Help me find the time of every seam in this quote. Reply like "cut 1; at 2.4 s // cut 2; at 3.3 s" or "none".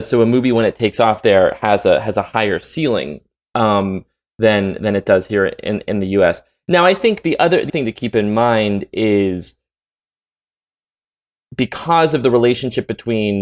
cut 1; at 7.7 s

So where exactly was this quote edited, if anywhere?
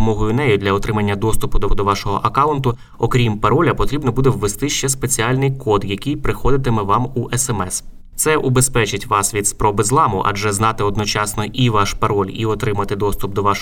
cut 1; at 1.7 s

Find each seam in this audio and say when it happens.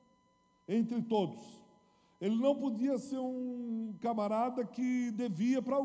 none

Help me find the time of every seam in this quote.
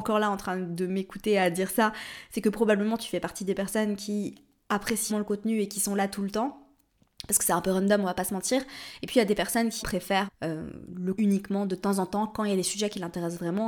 cut 1; at 5.1 s // cut 2; at 9.8 s // cut 3; at 10.3 s // cut 4; at 11.2 s

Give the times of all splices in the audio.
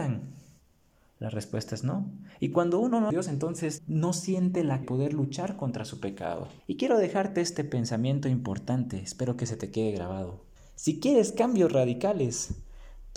cut 1; at 3.1 s // cut 2; at 3.8 s // cut 3; at 4.8 s // cut 4; at 6.6 s // cut 5; at 10.6 s

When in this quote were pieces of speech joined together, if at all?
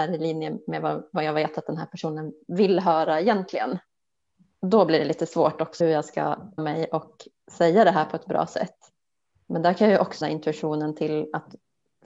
cut 1; at 5.8 s // cut 2; at 6.6 s // cut 3; at 10.2 s

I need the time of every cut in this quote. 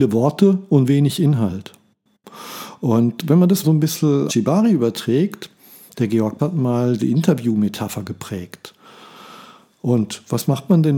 cut 1; at 3.6 s // cut 2; at 4.3 s // cut 3; at 6.4 s // cut 4; at 7.0 s

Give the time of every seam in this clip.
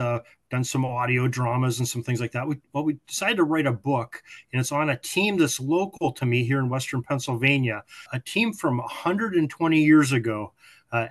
cut 1; at 8.1 s

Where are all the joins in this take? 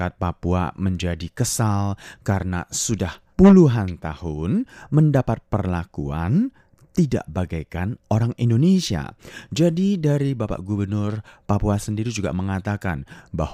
cut 1; at 3.3 s

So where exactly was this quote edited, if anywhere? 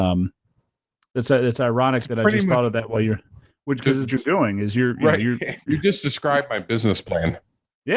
cut 1; at 4.1 s // cut 2; at 5.7 s

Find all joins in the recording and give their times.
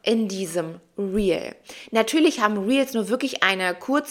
none

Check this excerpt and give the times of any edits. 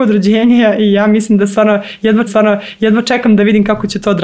cut 1; at 2.3 s

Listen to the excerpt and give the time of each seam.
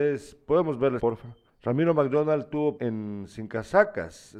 cut 1; at 1.0 s // cut 2; at 1.5 s // cut 3; at 2.8 s

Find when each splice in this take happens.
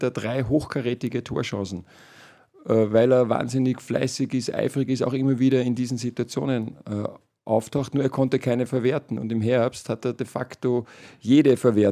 none

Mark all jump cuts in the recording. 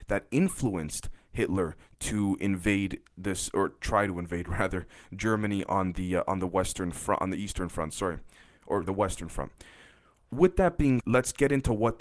cut 1; at 8.8 s // cut 2; at 11.0 s

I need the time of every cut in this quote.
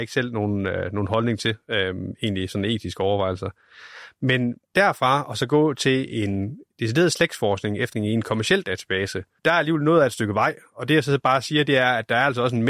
cut 1; at 4.6 s // cut 2; at 7.9 s

